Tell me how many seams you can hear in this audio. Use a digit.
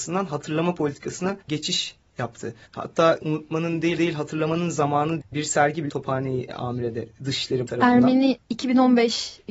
6